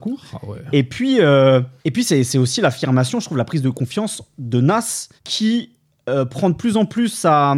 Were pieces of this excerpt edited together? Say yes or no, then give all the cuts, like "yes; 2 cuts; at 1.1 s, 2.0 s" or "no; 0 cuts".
yes; 2 cuts; at 1.8 s, 5.2 s